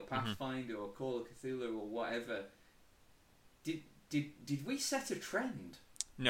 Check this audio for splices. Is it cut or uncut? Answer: uncut